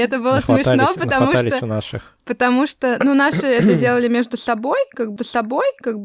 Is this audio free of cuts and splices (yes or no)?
no